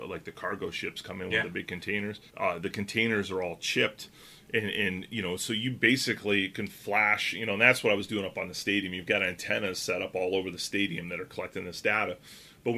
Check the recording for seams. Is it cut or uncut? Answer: cut